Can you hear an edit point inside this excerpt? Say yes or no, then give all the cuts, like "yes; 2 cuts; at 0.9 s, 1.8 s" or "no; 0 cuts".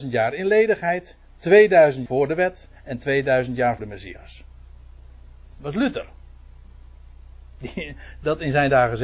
yes; 2 cuts; at 2.1 s, 3.8 s